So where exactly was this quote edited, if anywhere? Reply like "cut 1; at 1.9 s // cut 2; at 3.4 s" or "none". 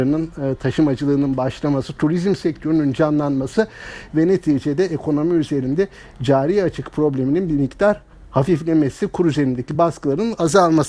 none